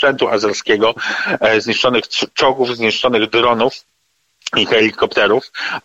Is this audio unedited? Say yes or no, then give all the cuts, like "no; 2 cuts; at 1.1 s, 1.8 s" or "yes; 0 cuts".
yes; 0 cuts